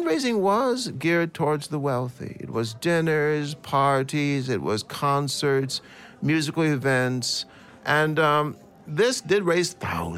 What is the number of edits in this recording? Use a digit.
0